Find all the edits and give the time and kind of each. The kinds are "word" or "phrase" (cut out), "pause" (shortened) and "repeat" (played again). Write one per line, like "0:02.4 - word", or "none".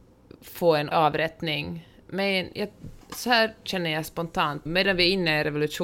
0:00.9 - word
0:03.0 - pause
0:04.7 - word